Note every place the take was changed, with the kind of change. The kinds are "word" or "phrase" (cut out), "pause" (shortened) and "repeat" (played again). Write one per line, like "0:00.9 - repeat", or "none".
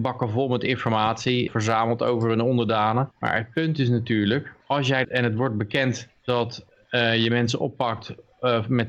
0:01.5 - word
0:03.1 - pause
0:04.6 - pause
0:05.0 - phrase
0:06.2 - pause